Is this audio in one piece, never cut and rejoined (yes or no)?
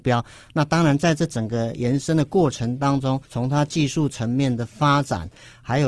no